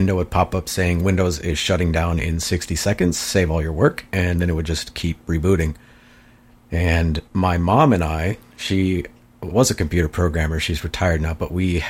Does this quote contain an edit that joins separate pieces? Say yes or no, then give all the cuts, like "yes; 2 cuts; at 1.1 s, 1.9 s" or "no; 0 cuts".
yes; 2 cuts; at 7.3 s, 9.5 s